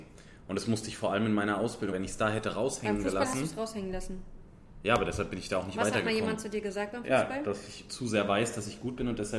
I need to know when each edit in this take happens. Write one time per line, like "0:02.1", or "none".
0:01.9